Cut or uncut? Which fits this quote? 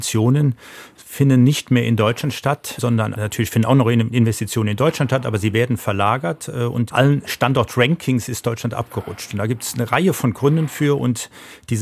cut